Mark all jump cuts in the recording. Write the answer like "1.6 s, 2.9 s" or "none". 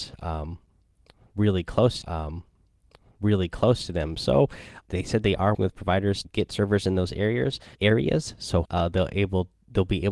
2.0 s, 4.8 s, 5.5 s, 6.2 s, 7.7 s, 8.6 s